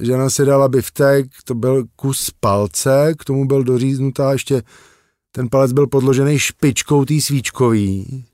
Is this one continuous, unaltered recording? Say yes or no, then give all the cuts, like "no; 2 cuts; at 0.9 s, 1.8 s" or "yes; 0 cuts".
yes; 0 cuts